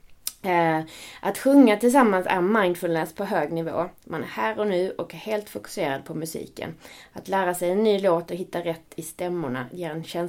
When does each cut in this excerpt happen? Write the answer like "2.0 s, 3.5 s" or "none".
none